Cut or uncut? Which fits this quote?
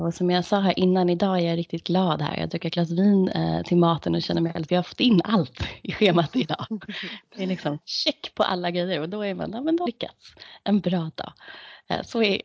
cut